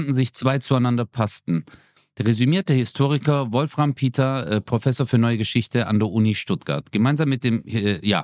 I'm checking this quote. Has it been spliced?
no; 0 cuts

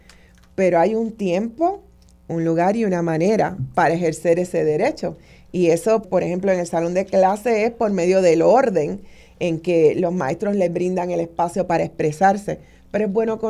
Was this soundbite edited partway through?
yes; 1 cut; at 6.0 s

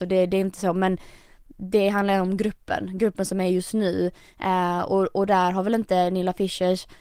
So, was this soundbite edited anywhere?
no; 0 cuts

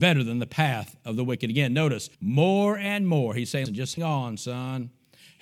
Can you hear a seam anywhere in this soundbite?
yes; 3 cuts; at 2.1 s, 3.7 s, 4.0 s

